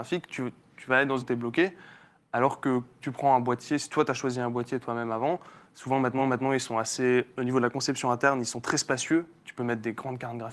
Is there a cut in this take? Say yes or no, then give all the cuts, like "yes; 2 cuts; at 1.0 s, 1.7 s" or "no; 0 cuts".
yes; 3 cuts; at 1.2 s, 3.0 s, 6.2 s